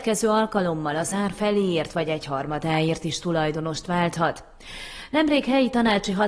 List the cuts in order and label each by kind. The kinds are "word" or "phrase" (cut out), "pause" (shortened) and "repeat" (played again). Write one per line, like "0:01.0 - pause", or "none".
none